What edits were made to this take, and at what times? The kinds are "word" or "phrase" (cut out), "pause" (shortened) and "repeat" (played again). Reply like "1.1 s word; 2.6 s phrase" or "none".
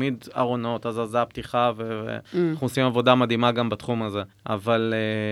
2.2 s pause; 4.3 s pause